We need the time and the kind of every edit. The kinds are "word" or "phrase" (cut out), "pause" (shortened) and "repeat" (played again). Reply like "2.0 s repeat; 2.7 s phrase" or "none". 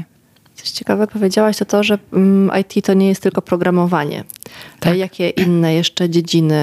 1.1 s word